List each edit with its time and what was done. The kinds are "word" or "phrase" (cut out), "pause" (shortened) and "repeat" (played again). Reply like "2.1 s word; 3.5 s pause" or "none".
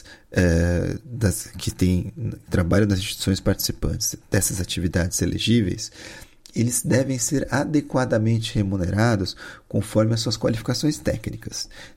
none